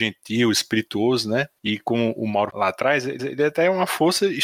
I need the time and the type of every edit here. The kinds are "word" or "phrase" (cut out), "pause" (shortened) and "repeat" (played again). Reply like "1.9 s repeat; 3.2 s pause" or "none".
2.5 s phrase; 3.2 s repeat